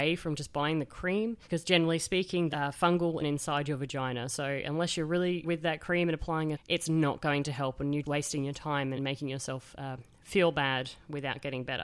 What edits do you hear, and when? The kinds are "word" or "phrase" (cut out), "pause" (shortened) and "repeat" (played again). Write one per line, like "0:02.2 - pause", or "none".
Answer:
0:01.4 - pause
0:02.5 - word
0:03.2 - phrase
0:05.4 - phrase
0:06.5 - phrase
0:08.0 - word
0:09.0 - phrase